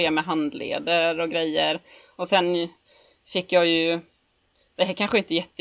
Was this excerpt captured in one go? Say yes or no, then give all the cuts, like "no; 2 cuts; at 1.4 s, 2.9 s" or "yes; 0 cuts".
yes; 0 cuts